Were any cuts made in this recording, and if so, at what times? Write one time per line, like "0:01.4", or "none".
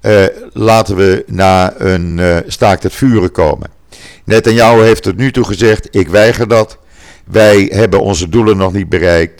none